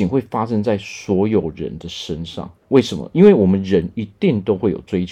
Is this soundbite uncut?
no; 1 cut; at 2.6 s

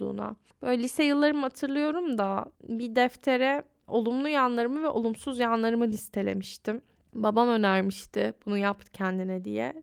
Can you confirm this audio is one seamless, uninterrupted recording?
no; 1 cut; at 2.5 s

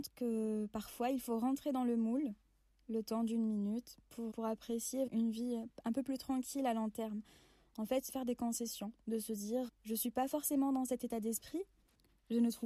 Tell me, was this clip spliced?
yes; 4 cuts; at 4.3 s, 5.1 s, 8.1 s, 9.7 s

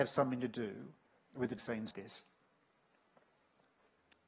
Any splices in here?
yes; 3 cuts; at 1.2 s, 1.6 s, 1.9 s

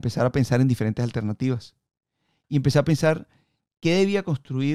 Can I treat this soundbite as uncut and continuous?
yes; 0 cuts

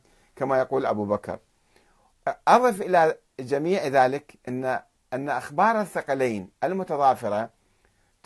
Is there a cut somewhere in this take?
no; 0 cuts

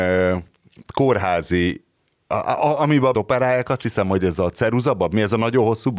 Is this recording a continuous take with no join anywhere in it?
no; 1 cut; at 3.1 s

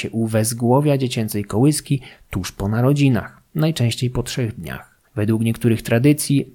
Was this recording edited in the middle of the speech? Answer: yes; 1 cut; at 5.1 s

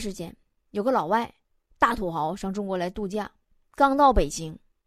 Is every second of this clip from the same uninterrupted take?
yes; 0 cuts

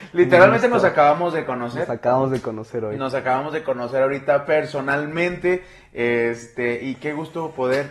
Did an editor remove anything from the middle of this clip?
no; 0 cuts

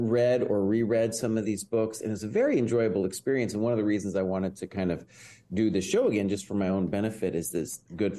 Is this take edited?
no; 0 cuts

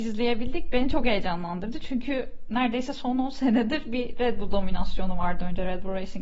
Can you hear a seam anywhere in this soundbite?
no; 0 cuts

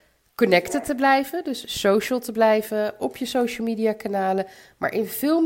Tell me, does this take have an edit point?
no; 0 cuts

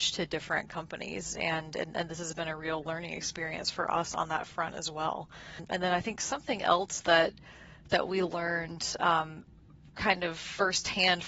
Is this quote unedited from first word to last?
yes; 0 cuts

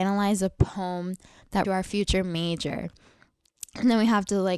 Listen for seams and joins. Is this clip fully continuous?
no; 1 cut; at 1.6 s

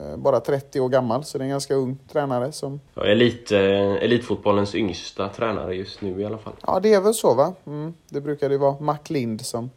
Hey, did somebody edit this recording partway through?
yes; 1 cut; at 2.9 s

